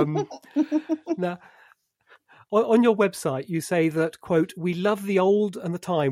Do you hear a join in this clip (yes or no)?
no